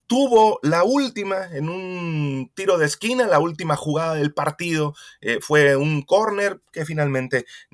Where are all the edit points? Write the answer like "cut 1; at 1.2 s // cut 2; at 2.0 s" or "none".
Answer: none